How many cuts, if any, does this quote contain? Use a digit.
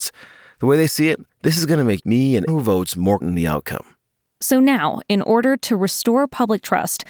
4